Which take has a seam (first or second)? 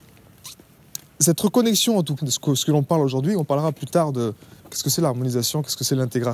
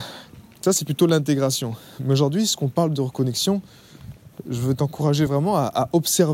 first